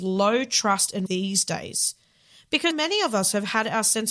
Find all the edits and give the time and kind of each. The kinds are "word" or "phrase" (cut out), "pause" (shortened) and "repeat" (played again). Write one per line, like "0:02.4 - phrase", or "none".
0:01.1 - word
0:02.7 - word